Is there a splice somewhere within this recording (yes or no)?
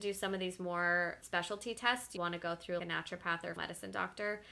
yes